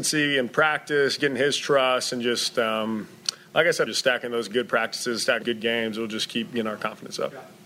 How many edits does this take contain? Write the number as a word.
two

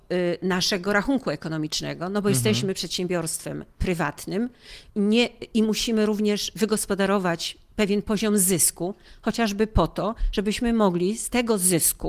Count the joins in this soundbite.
one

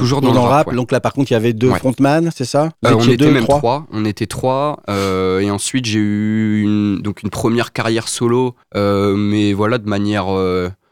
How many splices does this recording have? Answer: two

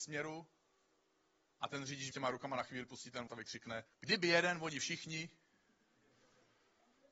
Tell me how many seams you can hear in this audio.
three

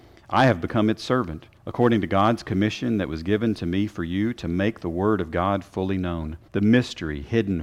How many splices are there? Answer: two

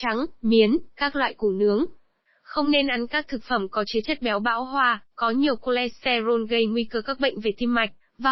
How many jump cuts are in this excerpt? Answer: zero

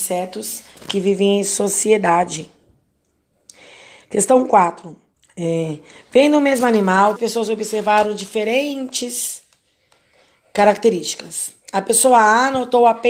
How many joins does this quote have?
two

